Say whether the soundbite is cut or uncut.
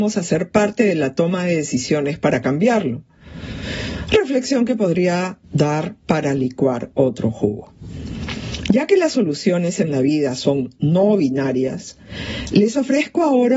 cut